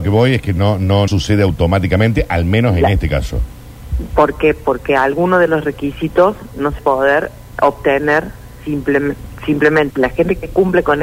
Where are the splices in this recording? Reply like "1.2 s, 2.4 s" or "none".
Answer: 1.1 s, 6.8 s, 7.5 s, 9.9 s